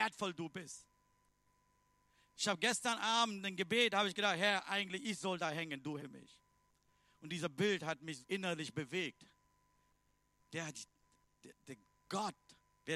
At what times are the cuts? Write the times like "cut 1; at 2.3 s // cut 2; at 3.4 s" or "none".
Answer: cut 1; at 6.0 s // cut 2; at 8.2 s